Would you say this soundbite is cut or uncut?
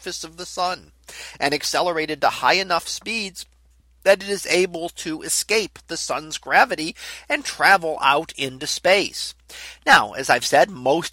uncut